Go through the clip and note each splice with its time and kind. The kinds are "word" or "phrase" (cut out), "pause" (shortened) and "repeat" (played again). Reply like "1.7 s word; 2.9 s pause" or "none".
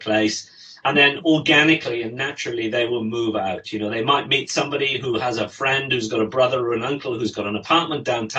none